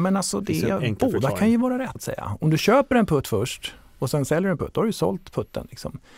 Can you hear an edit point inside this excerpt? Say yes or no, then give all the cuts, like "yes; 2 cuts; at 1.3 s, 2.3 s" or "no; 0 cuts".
yes; 1 cut; at 1.9 s